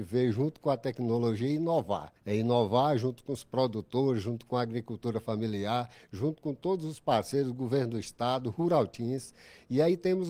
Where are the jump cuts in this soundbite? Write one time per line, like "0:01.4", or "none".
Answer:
0:02.2